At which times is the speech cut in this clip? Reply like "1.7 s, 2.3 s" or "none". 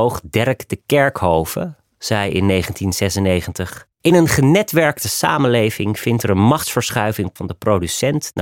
3.9 s, 7.4 s

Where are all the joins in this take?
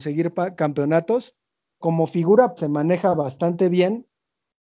1.8 s, 2.6 s

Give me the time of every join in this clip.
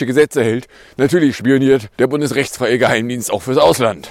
1.9 s

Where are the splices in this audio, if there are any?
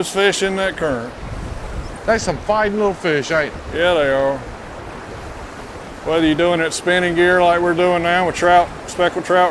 none

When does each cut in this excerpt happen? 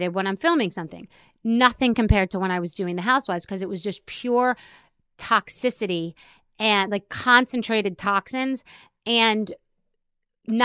none

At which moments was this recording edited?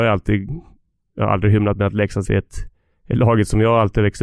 2.2 s

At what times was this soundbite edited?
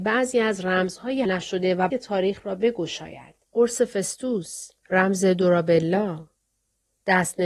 1.2 s, 1.9 s, 3.4 s, 4.8 s

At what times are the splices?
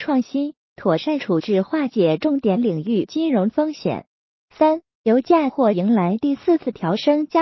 none

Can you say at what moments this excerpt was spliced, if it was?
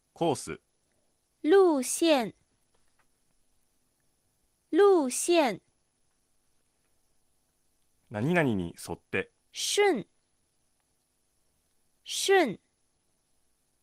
9.4 s

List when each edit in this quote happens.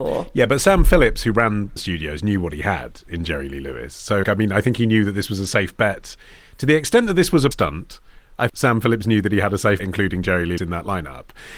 1.8 s, 4.2 s, 7.5 s, 8.5 s, 9.8 s, 10.6 s

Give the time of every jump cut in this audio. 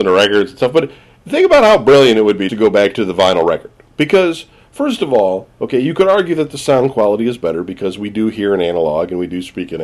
2.5 s

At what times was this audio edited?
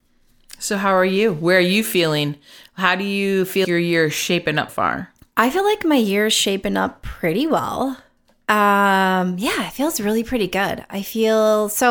3.6 s, 4.7 s

